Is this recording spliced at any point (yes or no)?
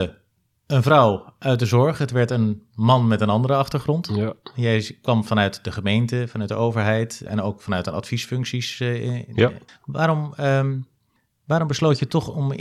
yes